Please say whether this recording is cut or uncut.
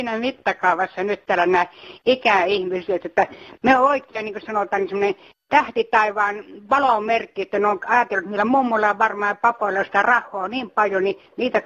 uncut